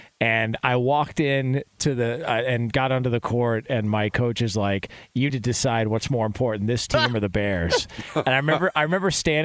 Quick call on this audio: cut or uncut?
cut